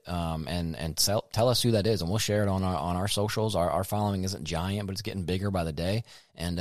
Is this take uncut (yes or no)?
yes